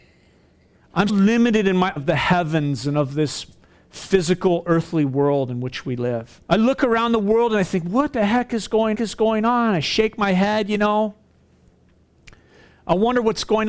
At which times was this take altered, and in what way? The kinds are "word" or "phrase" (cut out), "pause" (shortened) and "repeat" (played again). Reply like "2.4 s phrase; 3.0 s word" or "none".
1.1 s word; 2.0 s word; 6.4 s pause; 8.9 s repeat